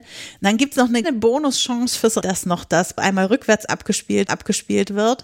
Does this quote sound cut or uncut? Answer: cut